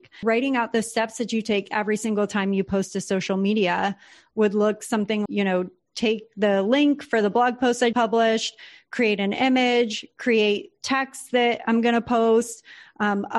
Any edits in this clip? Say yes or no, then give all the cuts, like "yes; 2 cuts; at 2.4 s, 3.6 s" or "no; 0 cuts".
yes; 2 cuts; at 5.3 s, 7.9 s